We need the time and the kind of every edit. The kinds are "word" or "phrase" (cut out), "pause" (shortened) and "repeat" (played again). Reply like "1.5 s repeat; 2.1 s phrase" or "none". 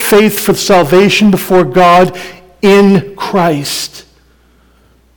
none